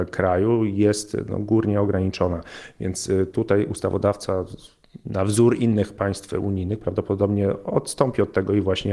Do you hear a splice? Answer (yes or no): no